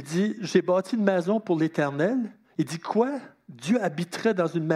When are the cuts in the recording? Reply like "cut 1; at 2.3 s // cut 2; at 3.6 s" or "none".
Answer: none